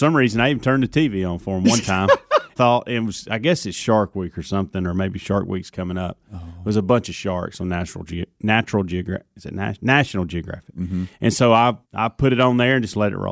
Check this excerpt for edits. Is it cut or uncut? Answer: cut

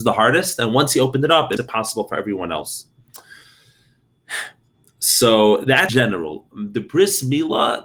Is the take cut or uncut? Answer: cut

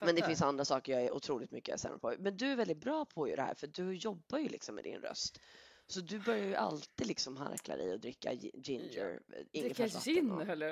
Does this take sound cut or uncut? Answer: uncut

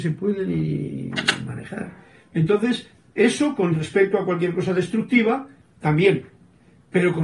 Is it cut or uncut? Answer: uncut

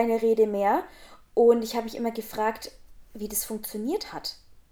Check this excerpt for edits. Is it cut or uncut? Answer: uncut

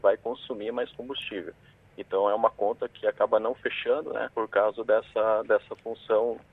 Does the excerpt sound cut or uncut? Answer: cut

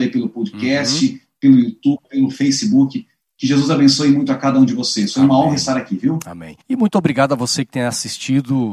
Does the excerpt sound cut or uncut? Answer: cut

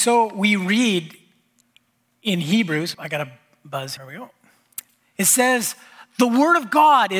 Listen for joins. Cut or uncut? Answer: cut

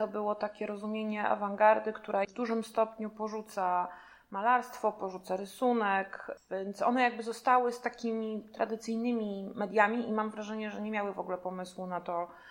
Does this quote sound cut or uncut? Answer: cut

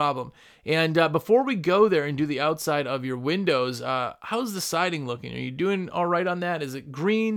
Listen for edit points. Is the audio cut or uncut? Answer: uncut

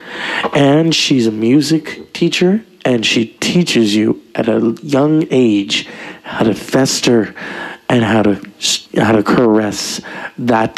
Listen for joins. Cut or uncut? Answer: cut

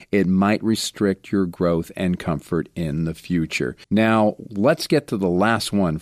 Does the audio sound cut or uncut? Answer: cut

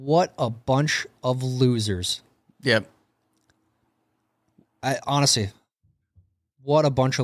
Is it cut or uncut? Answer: uncut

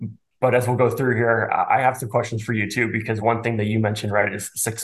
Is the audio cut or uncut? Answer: uncut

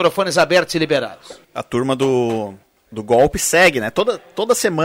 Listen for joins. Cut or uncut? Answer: cut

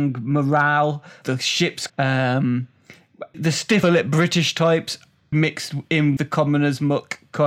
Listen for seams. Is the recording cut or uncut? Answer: cut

